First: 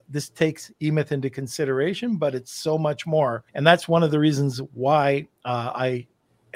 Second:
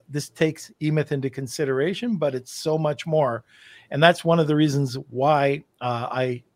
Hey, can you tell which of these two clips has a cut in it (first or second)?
first